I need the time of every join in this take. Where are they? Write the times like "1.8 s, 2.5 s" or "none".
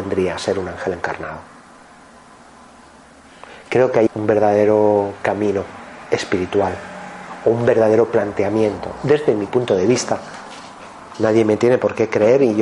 4.1 s